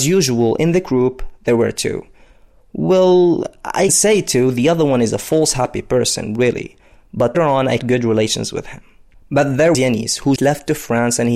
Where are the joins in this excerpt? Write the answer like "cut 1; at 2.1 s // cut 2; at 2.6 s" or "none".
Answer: cut 1; at 3.9 s // cut 2; at 7.3 s // cut 3; at 7.8 s // cut 4; at 9.7 s // cut 5; at 10.4 s